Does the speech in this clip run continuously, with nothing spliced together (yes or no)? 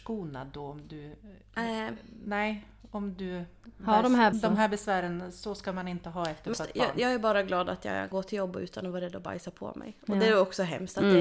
no